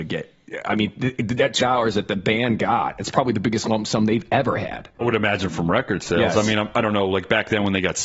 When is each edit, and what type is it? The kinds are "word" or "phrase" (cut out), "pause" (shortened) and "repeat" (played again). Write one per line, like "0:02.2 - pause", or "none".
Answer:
0:01.6 - word
0:05.0 - word